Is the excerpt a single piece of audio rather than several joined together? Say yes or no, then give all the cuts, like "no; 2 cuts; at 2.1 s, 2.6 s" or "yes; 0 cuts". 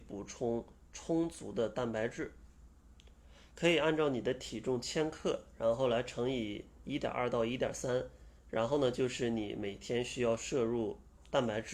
yes; 0 cuts